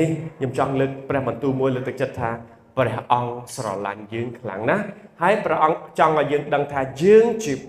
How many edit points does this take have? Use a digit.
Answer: 0